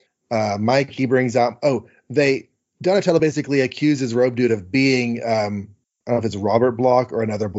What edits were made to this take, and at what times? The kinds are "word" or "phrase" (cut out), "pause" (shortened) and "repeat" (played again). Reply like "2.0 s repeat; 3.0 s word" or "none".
none